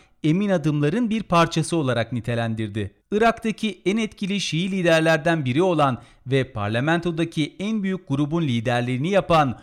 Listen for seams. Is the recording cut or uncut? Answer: cut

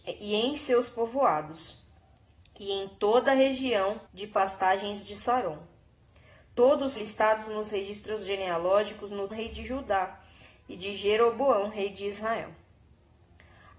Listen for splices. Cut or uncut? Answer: cut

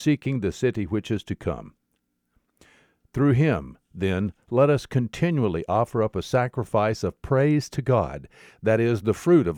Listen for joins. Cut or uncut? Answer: uncut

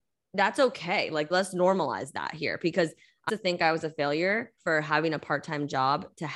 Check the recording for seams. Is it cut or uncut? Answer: cut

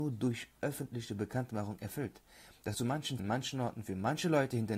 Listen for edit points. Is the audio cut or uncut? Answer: cut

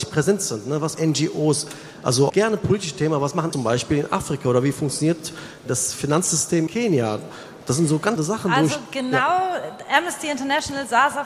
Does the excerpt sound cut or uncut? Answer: cut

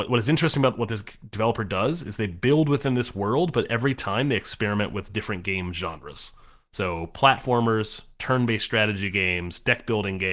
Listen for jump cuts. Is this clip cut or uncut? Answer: uncut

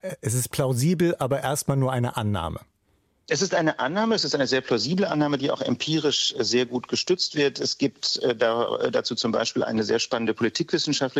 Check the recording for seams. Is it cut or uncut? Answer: uncut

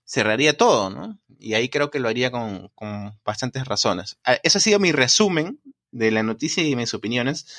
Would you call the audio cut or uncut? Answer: uncut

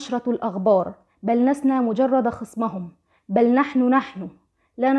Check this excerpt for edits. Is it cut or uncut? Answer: uncut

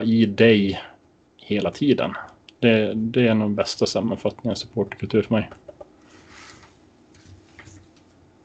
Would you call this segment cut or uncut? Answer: uncut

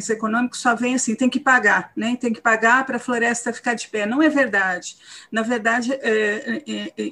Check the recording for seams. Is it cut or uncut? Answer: uncut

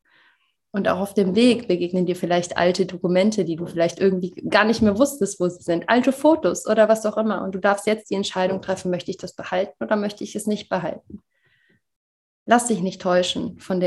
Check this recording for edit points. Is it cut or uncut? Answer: uncut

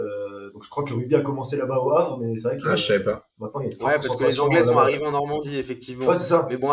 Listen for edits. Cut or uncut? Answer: uncut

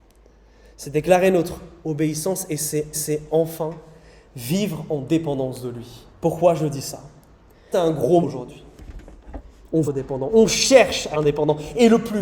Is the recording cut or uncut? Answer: cut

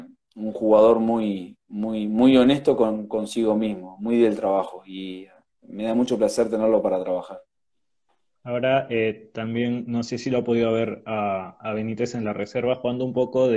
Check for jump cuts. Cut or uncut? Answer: uncut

